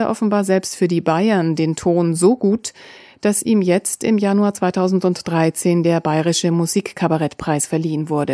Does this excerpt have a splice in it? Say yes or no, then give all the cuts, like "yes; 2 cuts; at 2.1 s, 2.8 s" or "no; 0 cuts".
no; 0 cuts